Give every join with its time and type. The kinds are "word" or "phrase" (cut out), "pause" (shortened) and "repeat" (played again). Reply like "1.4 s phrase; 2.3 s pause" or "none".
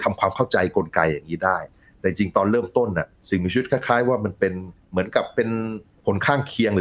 none